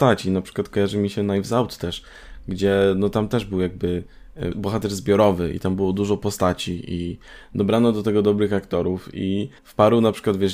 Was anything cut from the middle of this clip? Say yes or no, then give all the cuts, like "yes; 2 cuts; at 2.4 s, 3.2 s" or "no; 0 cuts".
yes; 2 cuts; at 4.5 s, 9.6 s